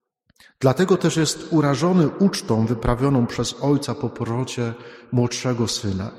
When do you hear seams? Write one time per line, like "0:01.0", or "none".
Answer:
none